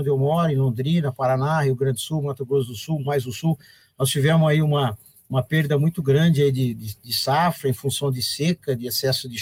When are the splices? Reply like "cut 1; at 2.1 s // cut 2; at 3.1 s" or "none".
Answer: none